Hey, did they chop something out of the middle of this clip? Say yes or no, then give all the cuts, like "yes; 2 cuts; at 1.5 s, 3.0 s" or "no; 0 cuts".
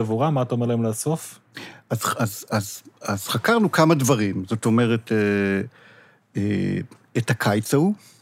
no; 0 cuts